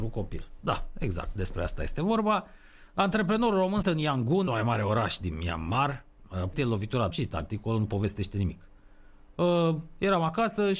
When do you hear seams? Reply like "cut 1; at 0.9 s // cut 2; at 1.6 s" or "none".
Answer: cut 1; at 3.8 s // cut 2; at 4.5 s // cut 3; at 6.5 s // cut 4; at 7.1 s